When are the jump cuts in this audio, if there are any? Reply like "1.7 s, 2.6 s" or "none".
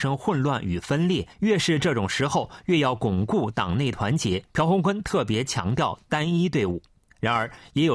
1.3 s, 4.5 s